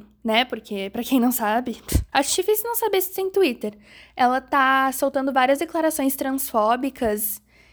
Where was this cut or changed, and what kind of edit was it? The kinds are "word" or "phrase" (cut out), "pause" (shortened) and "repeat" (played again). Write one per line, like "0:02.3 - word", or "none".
0:02.1 - pause